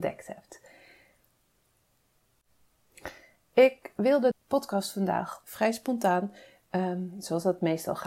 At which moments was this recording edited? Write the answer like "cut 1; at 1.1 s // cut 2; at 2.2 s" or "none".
cut 1; at 4.3 s // cut 2; at 5.4 s